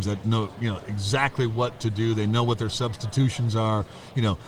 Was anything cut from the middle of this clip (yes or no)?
no